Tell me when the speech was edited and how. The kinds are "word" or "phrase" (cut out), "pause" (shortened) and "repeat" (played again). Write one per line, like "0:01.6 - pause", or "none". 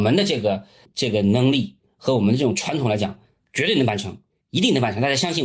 none